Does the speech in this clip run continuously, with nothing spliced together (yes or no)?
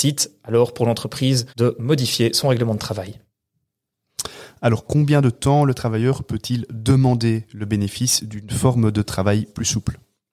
no